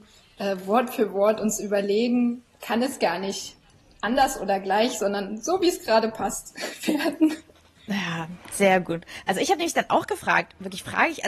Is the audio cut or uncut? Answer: uncut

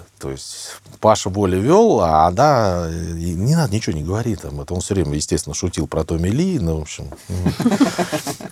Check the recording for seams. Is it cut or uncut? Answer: uncut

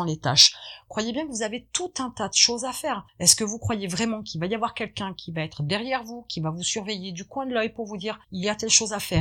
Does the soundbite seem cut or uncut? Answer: cut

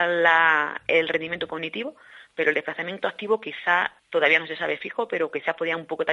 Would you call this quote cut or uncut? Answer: cut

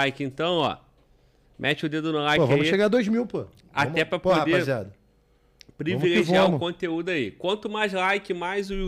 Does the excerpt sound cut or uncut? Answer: uncut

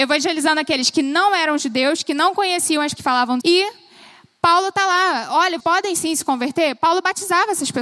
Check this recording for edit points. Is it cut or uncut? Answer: cut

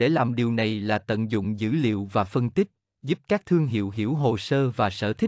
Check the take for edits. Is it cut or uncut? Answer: uncut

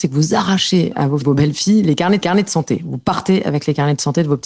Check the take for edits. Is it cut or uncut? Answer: cut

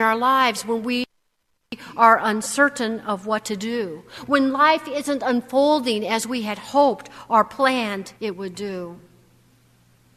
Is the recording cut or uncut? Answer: cut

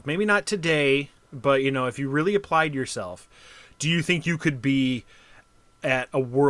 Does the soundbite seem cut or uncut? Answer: uncut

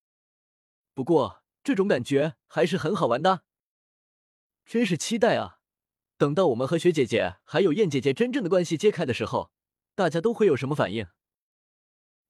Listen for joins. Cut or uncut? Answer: cut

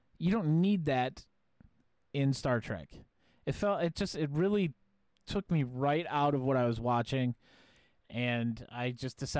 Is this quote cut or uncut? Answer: uncut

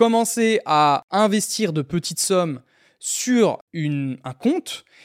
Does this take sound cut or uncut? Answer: uncut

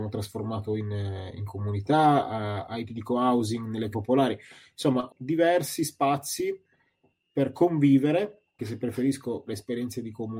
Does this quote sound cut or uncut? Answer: cut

